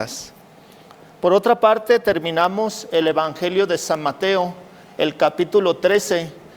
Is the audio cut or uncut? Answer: uncut